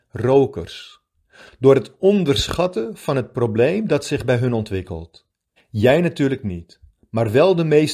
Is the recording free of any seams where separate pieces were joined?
no; 1 cut; at 5.3 s

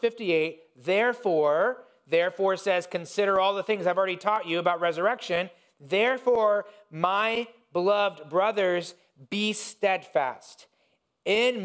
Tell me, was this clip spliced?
no; 0 cuts

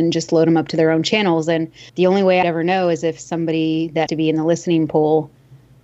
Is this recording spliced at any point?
yes; 3 cuts; at 1.9 s, 2.4 s, 4.1 s

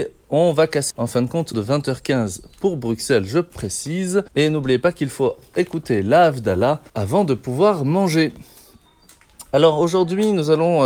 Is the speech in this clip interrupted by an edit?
yes; 4 cuts; at 0.9 s, 1.5 s, 4.3 s, 6.9 s

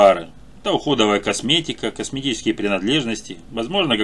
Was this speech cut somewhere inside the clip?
no; 0 cuts

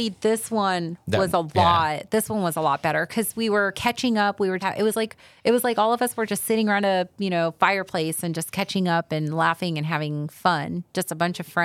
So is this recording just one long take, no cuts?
no; 1 cut; at 4.6 s

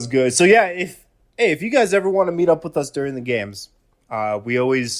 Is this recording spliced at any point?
no; 0 cuts

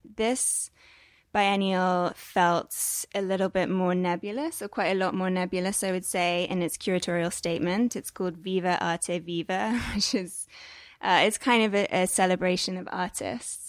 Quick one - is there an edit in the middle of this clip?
no; 0 cuts

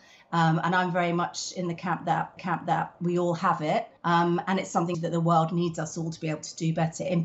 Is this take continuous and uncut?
no; 3 cuts; at 2.4 s, 4.0 s, 4.9 s

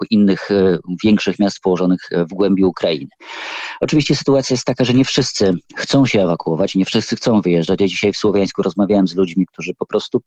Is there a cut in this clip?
yes; 1 cut; at 5.7 s

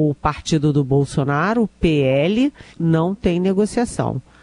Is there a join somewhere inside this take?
yes; 1 cut; at 2.7 s

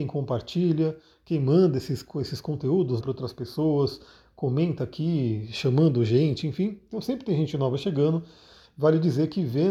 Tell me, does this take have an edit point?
yes; 1 cut; at 3.0 s

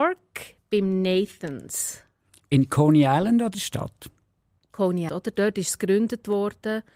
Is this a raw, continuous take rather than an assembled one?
no; 2 cuts; at 3.5 s, 5.1 s

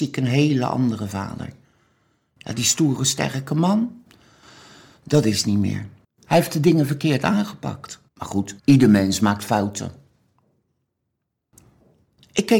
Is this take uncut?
no; 3 cuts; at 6.0 s, 8.1 s, 8.6 s

